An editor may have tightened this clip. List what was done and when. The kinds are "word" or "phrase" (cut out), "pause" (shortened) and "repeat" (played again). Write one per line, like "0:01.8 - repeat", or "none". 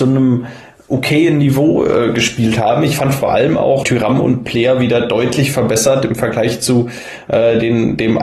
0:03.8 - word